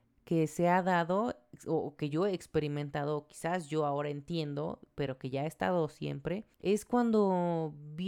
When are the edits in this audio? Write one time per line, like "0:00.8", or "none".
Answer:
0:06.5